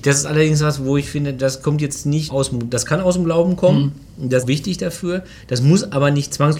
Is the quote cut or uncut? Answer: cut